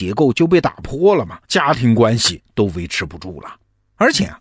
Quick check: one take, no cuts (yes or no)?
no